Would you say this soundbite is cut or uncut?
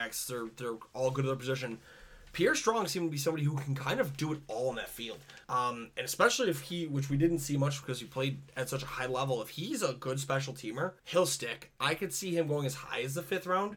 cut